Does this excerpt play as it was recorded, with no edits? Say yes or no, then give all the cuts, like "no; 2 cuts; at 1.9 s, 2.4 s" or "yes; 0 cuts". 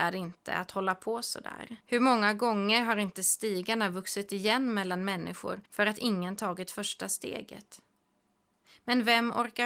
no; 2 cuts; at 1.8 s, 5.7 s